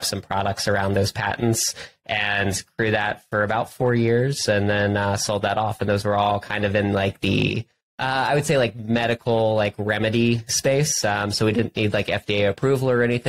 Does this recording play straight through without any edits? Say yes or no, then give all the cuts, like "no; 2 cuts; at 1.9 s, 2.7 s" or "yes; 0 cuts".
yes; 0 cuts